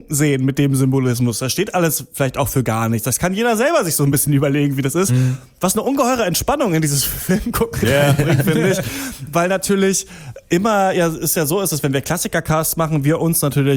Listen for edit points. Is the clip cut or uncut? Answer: uncut